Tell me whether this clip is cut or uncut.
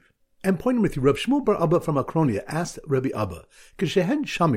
uncut